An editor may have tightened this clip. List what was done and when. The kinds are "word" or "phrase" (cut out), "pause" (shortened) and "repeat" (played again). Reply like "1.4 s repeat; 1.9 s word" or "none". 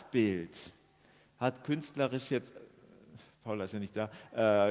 none